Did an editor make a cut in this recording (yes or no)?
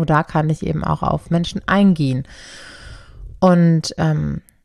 no